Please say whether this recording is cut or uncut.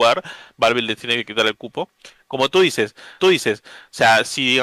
cut